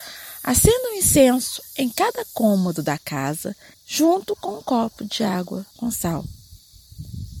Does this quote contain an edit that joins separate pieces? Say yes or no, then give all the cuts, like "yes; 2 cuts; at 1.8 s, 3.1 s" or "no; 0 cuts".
yes; 2 cuts; at 3.7 s, 5.7 s